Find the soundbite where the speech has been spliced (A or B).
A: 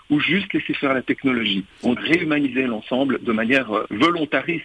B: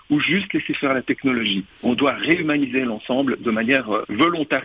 A